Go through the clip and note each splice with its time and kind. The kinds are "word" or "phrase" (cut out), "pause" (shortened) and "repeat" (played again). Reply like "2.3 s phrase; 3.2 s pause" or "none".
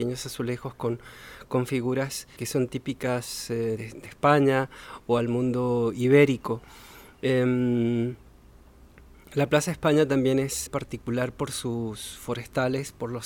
2.4 s word; 3.8 s word; 10.7 s word